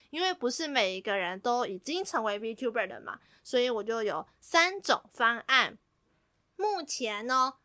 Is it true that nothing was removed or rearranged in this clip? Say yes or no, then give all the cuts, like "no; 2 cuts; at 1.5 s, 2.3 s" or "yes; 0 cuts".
yes; 0 cuts